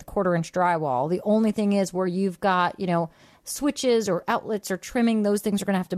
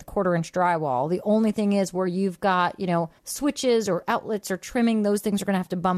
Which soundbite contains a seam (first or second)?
second